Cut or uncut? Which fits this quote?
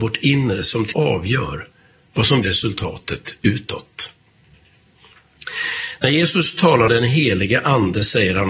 cut